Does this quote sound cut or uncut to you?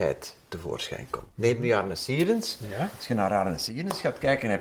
uncut